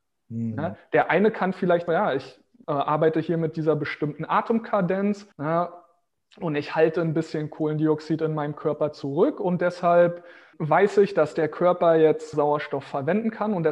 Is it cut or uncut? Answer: cut